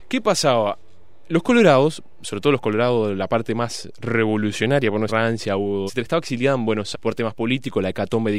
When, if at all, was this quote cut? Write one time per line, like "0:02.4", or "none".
0:05.1
0:05.9
0:06.9